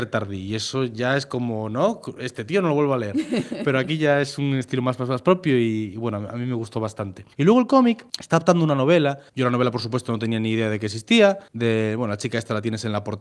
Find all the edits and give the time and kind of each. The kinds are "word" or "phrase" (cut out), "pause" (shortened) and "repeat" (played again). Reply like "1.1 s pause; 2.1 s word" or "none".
7.3 s pause; 8.1 s pause; 9.3 s pause; 11.5 s pause